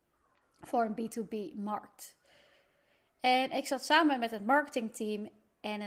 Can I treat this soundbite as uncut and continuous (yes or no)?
yes